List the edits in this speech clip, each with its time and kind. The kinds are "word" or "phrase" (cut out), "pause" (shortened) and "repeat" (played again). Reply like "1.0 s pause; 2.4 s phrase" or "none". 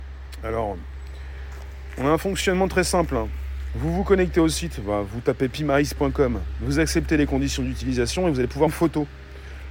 8.7 s word